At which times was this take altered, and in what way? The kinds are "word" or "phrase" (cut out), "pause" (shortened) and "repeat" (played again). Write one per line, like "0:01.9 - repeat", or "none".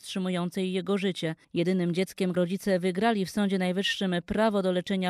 0:01.4 - pause
0:02.3 - word